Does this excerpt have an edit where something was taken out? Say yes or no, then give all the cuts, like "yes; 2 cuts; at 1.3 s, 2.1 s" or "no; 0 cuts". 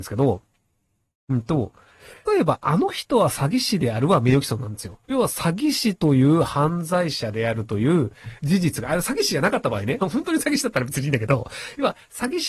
yes; 3 cuts; at 2.2 s, 5.0 s, 10.0 s